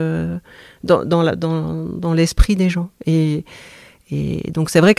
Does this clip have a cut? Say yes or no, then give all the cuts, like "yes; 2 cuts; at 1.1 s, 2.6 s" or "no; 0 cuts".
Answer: no; 0 cuts